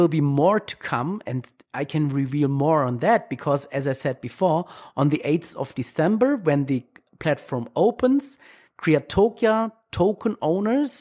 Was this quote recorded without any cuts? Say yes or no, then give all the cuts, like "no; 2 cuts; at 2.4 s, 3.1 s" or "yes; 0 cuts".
yes; 0 cuts